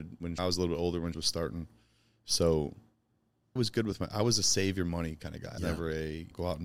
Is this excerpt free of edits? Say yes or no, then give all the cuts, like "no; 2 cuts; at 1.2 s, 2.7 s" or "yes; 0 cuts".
no; 3 cuts; at 1.1 s, 3.6 s, 5.6 s